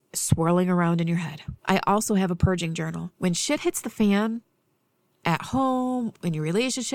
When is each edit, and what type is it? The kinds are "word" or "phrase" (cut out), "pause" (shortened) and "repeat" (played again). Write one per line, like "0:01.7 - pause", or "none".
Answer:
0:01.6 - pause
0:03.1 - pause

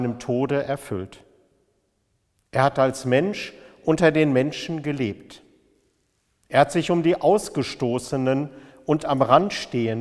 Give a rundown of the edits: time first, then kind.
none

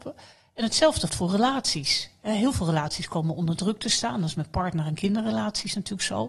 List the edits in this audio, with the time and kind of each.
0:01.1 - word

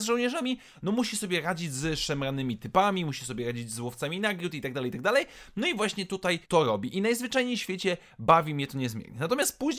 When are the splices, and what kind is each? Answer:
0:06.4 - pause

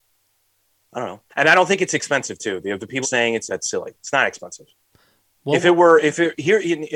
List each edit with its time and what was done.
0:01.3 - pause
0:03.0 - phrase
0:03.5 - phrase
0:04.9 - pause

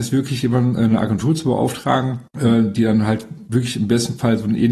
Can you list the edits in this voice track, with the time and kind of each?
0:02.3 - pause

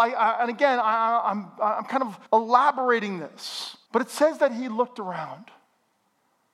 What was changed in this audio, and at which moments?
0:02.3 - pause
0:03.9 - pause

